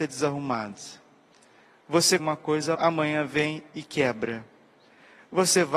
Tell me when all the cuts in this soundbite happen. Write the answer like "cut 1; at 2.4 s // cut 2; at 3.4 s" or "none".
cut 1; at 2.2 s // cut 2; at 2.7 s